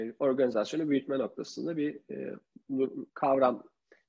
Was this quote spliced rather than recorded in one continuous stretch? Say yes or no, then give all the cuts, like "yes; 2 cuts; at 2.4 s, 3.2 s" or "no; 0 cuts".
yes; 1 cut; at 3.1 s